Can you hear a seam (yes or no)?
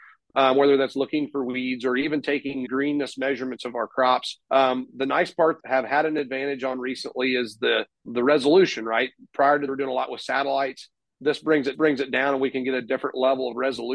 yes